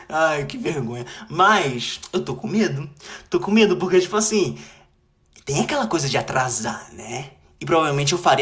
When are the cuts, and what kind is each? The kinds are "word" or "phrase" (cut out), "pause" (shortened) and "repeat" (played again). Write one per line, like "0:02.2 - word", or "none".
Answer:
none